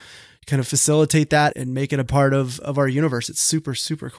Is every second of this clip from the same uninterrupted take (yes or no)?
no